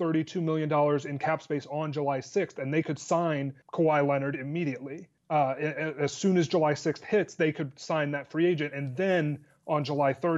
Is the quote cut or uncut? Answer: cut